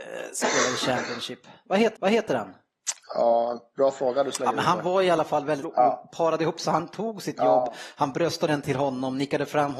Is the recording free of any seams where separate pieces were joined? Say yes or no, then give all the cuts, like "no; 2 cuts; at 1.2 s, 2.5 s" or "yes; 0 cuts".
no; 3 cuts; at 2.0 s, 5.6 s, 8.5 s